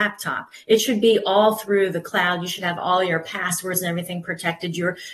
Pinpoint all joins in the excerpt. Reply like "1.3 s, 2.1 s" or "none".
none